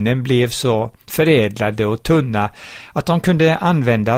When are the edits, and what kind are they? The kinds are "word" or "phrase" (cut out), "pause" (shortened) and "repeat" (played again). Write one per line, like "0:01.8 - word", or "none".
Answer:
none